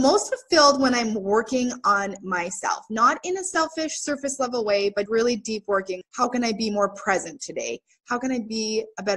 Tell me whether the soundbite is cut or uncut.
cut